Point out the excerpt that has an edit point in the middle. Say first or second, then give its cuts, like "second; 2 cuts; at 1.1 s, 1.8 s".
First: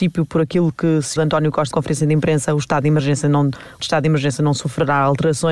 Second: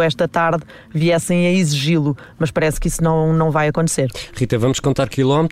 first; 3 cuts; at 1.2 s, 1.7 s, 3.8 s